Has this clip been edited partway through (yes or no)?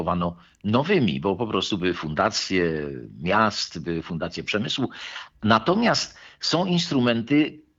no